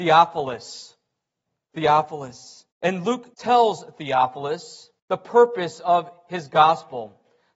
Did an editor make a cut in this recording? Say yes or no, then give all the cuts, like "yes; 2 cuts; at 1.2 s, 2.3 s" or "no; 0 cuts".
yes; 3 cuts; at 2.7 s, 3.3 s, 5.0 s